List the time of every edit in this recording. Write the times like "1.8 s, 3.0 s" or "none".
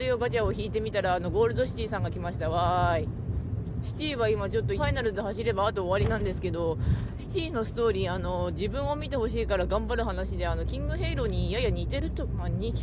4.7 s